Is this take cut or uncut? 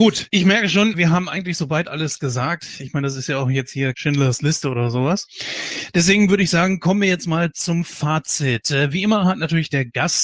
cut